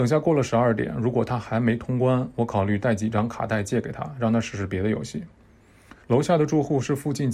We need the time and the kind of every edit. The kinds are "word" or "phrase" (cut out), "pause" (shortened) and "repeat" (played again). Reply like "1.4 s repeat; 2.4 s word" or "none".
6.0 s pause